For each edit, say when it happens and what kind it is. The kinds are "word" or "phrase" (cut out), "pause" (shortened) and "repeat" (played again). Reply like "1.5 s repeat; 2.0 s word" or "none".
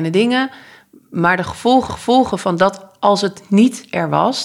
1.9 s repeat